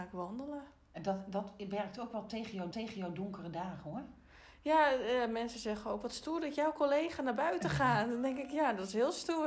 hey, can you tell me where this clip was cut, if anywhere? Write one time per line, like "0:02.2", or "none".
0:02.7